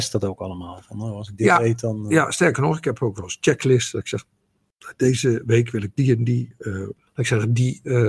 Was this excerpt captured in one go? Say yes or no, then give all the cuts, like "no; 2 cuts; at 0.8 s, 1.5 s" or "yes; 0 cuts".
yes; 0 cuts